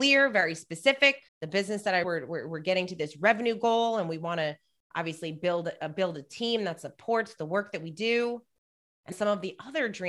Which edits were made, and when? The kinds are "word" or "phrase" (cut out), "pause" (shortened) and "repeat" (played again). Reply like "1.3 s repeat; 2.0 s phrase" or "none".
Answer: 1.3 s pause; 2.0 s word; 9.1 s word